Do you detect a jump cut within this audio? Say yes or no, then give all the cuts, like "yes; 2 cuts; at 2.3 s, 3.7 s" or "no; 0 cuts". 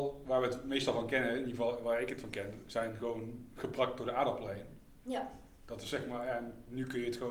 no; 0 cuts